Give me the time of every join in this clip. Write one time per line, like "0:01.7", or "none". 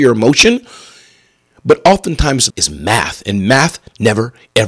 0:02.5